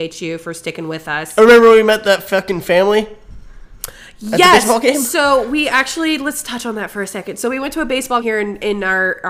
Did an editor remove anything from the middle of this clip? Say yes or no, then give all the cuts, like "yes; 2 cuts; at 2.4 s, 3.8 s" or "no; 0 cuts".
yes; 1 cut; at 8.2 s